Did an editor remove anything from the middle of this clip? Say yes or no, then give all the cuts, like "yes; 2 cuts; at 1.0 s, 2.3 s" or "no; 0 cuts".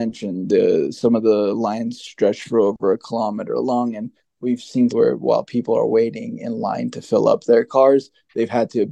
yes; 1 cut; at 4.9 s